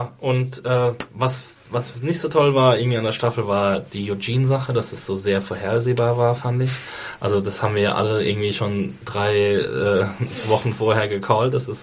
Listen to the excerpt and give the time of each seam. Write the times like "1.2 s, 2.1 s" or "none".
1.6 s